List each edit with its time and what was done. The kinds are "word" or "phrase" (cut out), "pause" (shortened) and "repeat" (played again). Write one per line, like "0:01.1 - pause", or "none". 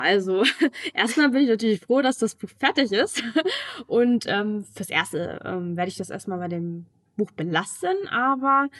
none